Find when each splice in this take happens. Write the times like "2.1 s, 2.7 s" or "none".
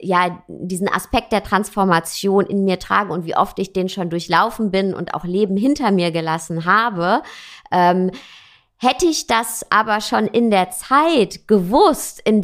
none